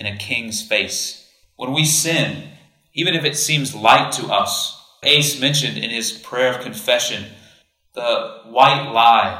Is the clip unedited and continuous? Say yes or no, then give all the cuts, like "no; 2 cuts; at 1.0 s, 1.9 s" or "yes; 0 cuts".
no; 1 cut; at 5.0 s